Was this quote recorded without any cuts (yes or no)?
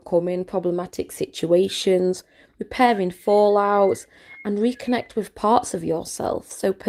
yes